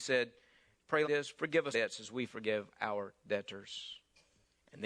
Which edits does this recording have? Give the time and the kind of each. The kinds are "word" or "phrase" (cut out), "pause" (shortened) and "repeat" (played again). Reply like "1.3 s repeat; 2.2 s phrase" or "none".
1.0 s word; 1.7 s word